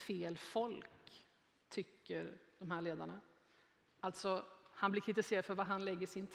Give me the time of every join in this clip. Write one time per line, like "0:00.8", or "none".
none